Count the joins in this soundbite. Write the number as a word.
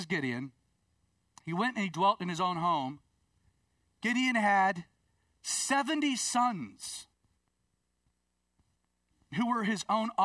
zero